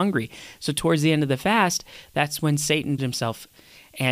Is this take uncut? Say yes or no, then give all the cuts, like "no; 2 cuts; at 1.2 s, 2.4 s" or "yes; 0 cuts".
no; 1 cut; at 3.0 s